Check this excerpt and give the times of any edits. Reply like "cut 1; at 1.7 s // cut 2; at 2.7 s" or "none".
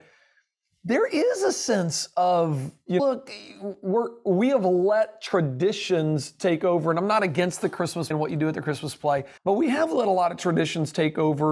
cut 1; at 3.0 s // cut 2; at 8.1 s // cut 3; at 9.4 s